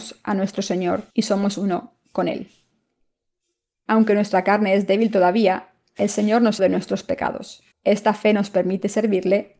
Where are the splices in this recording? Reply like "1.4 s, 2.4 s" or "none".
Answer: 1.1 s, 6.6 s, 7.7 s

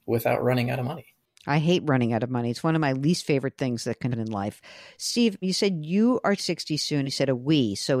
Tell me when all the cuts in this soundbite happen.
4.1 s, 5.4 s, 6.4 s, 7.0 s

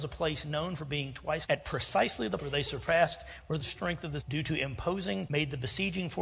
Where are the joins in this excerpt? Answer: 1.5 s, 2.4 s, 3.6 s, 4.2 s, 5.3 s

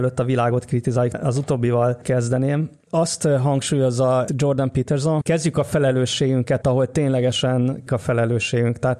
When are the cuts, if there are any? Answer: 1.1 s, 4.3 s, 5.2 s, 6.6 s, 7.9 s

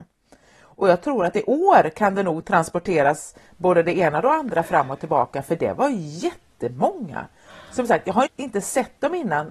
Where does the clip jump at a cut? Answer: 8.3 s

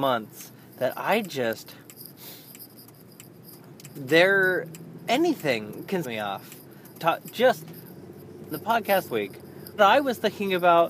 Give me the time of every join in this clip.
3.9 s, 6.0 s, 6.9 s, 8.5 s, 9.1 s, 9.8 s

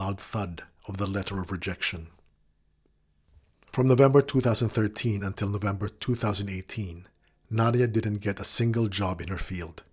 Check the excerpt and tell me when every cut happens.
none

